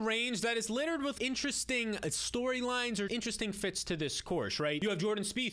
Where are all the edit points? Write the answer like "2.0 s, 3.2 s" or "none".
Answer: 1.2 s, 3.1 s